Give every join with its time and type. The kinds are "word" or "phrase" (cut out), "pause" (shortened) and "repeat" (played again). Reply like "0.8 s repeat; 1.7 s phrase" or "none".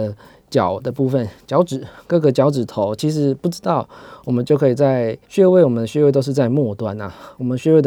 5.2 s pause